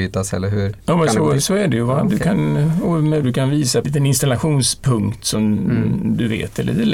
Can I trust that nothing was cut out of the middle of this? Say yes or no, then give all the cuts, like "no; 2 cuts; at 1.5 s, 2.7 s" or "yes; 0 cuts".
no; 3 cuts; at 1.4 s, 3.2 s, 3.8 s